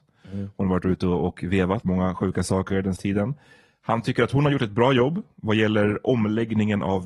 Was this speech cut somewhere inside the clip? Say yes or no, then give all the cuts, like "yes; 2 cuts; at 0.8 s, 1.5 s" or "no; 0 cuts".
yes; 2 cuts; at 1.8 s, 3.0 s